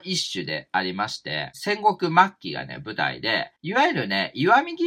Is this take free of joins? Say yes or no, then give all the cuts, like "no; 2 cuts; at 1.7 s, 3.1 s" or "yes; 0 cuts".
yes; 0 cuts